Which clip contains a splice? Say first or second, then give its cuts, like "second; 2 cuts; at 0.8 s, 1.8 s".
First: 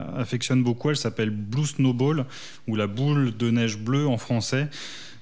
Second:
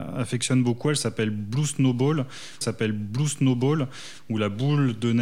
second; 1 cut; at 2.6 s